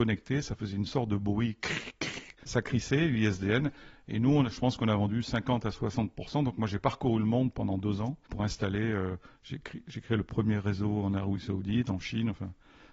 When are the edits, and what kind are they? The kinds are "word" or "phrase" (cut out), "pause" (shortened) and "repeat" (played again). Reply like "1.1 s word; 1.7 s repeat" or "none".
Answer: 8.2 s pause